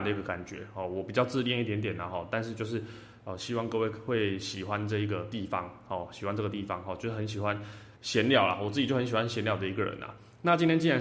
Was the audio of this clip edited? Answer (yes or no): yes